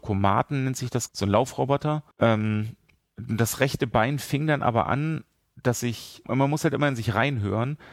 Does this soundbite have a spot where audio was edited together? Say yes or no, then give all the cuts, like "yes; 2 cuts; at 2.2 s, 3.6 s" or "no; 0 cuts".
yes; 3 cuts; at 1.1 s, 2.1 s, 6.2 s